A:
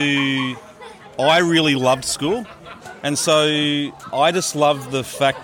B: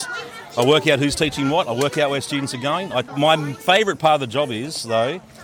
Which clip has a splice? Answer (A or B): B